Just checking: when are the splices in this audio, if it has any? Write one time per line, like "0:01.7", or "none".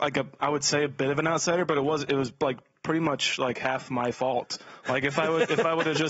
none